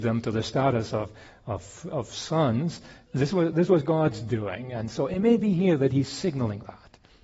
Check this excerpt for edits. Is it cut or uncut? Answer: uncut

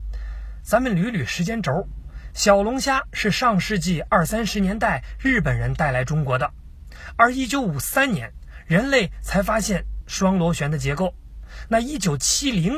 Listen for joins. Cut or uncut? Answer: cut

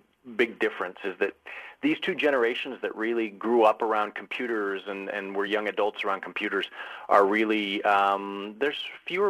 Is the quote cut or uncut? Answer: uncut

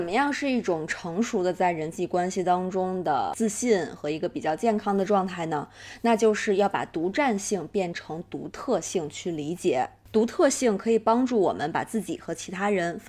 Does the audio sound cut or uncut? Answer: uncut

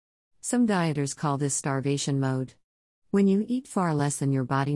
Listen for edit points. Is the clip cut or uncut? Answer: uncut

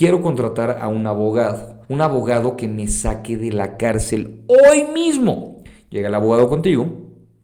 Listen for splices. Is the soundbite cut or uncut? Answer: cut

